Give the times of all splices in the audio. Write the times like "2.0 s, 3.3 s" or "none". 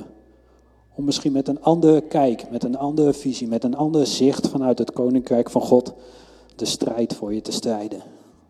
none